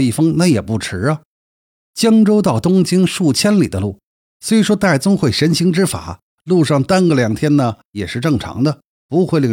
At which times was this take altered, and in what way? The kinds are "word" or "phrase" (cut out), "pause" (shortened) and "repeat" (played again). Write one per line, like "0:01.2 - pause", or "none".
none